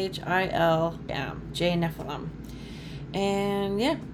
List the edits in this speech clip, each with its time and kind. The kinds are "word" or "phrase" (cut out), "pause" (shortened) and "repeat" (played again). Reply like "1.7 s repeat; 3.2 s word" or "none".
1.1 s word